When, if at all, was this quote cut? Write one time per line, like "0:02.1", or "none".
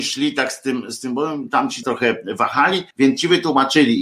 0:01.8
0:02.9